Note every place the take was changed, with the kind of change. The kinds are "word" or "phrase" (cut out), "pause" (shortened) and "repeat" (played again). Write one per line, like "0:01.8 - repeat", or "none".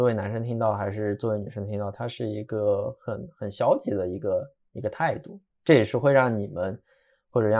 none